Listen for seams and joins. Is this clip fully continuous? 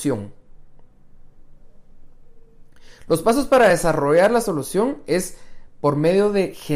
yes; 0 cuts

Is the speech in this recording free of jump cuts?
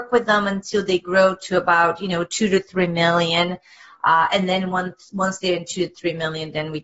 yes; 0 cuts

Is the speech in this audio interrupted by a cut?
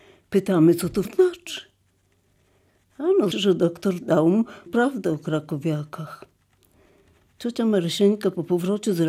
yes; 3 cuts; at 1.1 s, 3.3 s, 4.7 s

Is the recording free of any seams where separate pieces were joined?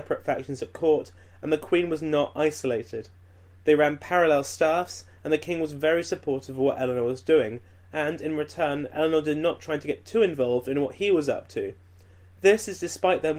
yes; 0 cuts

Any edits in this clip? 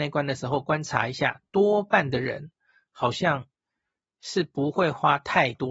no; 0 cuts

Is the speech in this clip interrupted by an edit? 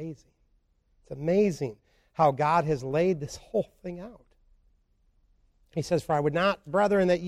no; 0 cuts

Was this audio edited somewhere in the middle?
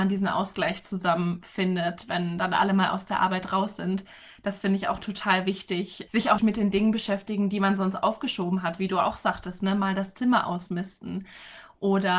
yes; 2 cuts; at 6.1 s, 6.4 s

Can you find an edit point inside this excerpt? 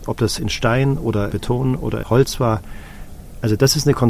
yes; 2 cuts; at 1.3 s, 2.0 s

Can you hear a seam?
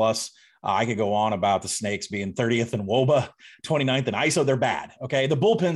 no; 0 cuts

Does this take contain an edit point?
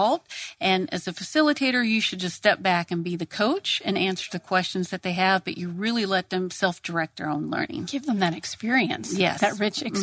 no; 0 cuts

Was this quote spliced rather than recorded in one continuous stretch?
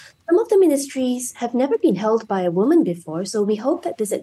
no; 0 cuts

